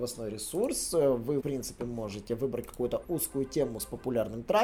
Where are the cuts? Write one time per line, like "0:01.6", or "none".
0:01.4
0:03.0

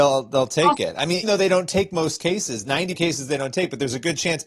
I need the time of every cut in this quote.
0:01.2
0:02.9

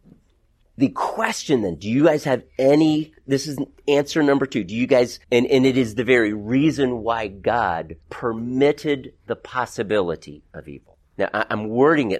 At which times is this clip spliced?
0:05.2
0:08.0
0:11.0

